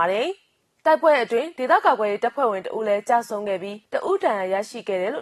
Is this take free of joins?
no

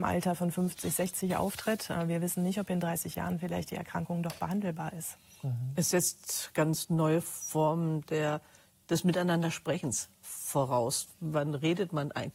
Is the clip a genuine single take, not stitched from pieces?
yes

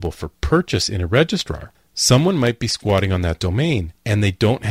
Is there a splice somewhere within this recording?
no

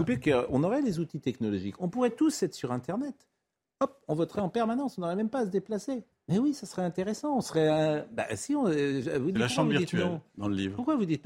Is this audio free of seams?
no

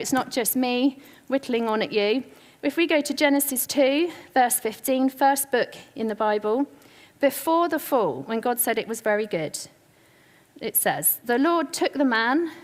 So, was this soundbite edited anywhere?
no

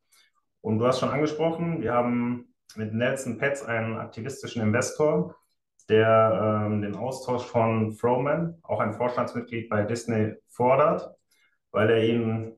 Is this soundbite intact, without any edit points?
yes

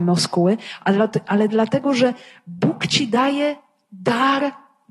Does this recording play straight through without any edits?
yes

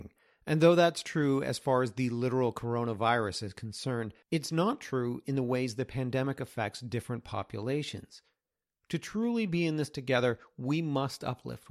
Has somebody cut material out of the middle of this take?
yes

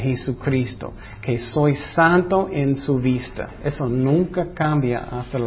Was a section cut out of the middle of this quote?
no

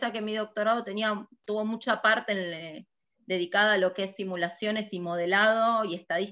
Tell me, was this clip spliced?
no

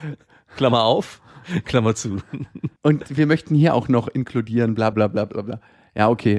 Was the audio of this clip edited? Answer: yes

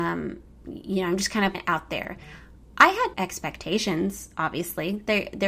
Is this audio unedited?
no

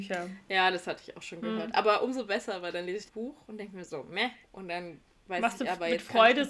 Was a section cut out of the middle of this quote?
yes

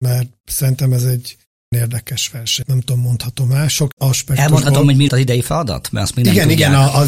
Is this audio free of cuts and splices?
no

